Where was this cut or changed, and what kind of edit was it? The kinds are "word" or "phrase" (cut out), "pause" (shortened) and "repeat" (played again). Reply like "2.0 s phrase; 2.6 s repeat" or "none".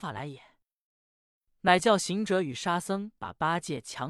3.2 s pause